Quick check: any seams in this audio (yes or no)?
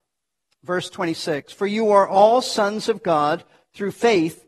no